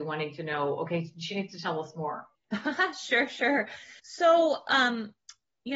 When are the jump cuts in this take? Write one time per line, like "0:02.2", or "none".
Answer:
0:02.3
0:04.0